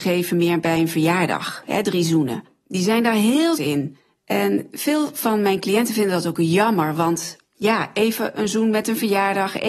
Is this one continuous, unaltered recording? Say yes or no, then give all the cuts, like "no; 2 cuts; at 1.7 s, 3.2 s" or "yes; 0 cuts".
no; 1 cut; at 3.6 s